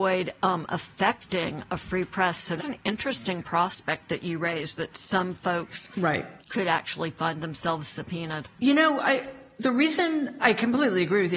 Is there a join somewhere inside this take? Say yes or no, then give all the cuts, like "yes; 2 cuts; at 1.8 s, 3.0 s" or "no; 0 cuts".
yes; 3 cuts; at 2.6 s, 6.4 s, 10.4 s